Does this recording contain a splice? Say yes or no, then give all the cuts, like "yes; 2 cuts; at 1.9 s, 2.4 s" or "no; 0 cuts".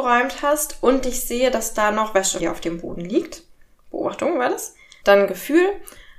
yes; 1 cut; at 2.4 s